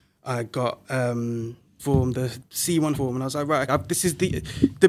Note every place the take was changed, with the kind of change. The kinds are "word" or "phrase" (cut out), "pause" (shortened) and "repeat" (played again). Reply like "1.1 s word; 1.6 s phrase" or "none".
1.8 s word; 2.4 s word; 2.9 s word; 3.7 s word